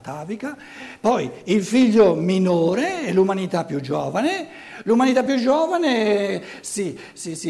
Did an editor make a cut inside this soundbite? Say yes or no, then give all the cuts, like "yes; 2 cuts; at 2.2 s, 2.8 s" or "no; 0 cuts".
no; 0 cuts